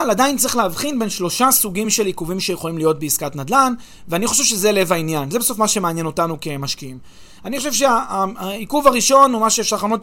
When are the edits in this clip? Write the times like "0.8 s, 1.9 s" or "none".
none